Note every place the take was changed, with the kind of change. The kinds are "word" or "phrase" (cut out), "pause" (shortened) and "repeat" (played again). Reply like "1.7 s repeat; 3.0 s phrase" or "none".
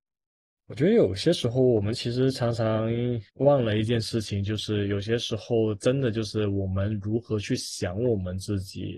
3.3 s pause